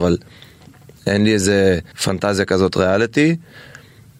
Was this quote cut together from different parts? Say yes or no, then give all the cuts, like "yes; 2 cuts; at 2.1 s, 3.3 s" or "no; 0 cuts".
yes; 2 cuts; at 1.9 s, 2.7 s